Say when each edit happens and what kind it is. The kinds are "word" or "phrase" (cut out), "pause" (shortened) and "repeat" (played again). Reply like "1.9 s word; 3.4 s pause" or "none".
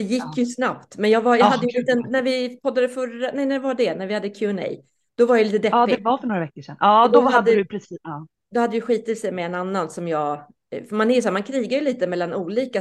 none